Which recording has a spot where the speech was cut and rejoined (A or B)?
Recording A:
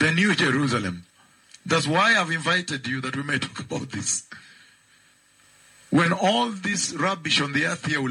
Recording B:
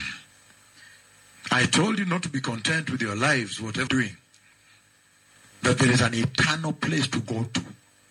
B